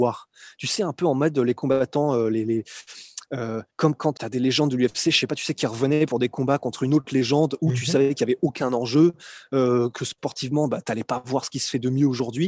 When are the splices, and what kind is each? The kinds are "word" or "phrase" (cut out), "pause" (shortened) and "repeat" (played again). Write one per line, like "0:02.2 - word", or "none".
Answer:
0:03.7 - pause
0:04.2 - word